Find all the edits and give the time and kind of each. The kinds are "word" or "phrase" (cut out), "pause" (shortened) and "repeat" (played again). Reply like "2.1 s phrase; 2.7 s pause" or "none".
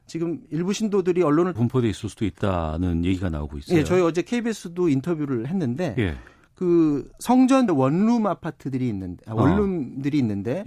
1.6 s phrase; 7.7 s word